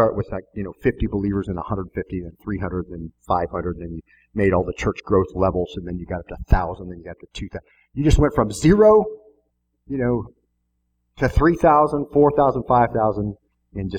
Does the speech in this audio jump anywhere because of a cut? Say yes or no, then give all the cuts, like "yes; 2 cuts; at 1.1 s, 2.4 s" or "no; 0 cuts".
no; 0 cuts